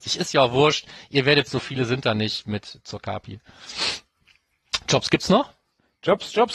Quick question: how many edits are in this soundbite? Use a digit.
1